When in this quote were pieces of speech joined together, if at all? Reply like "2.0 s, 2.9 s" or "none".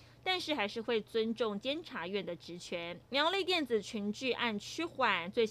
3.0 s

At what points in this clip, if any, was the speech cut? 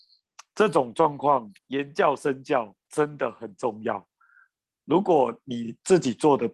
1.6 s, 2.8 s

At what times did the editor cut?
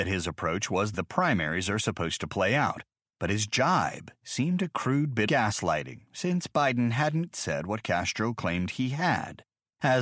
0.9 s, 5.3 s, 7.3 s

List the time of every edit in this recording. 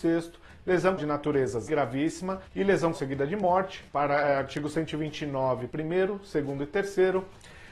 1.0 s, 1.7 s, 2.5 s, 2.9 s, 3.9 s, 5.7 s

